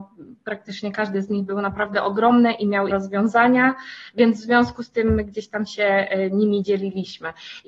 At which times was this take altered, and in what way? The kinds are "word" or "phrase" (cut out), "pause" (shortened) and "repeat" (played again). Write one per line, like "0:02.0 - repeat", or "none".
0:02.9 - word